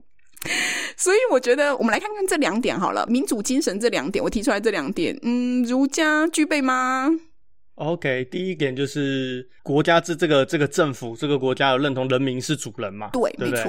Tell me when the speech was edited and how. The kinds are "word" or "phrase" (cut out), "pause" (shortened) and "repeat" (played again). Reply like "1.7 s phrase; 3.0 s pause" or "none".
9.6 s pause